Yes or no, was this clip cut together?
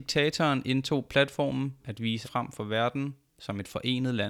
yes